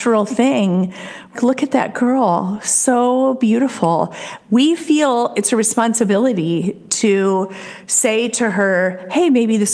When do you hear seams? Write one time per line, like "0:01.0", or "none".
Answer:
0:01.3